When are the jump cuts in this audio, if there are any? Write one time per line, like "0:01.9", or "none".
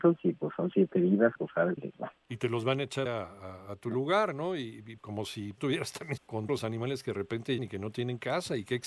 0:01.4
0:01.8
0:03.1
0:05.0
0:05.6
0:06.2
0:06.5
0:07.6